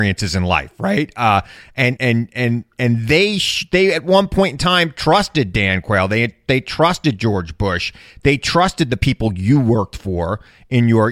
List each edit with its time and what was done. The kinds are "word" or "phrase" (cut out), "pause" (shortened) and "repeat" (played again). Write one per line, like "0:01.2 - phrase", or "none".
0:02.0 - word